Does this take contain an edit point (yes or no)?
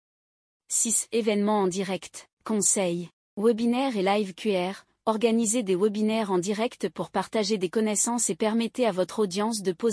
yes